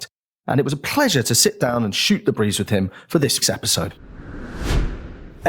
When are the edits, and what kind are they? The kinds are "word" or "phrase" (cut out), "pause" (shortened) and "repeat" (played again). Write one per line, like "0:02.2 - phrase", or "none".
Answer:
0:03.4 - word